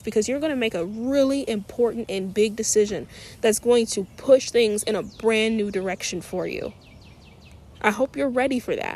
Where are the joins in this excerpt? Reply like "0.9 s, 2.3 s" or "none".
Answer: none